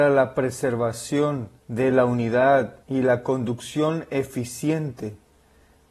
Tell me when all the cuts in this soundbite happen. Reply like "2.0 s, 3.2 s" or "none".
1.6 s, 2.8 s